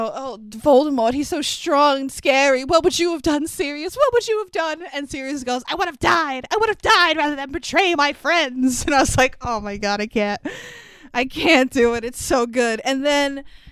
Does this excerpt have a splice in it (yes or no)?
no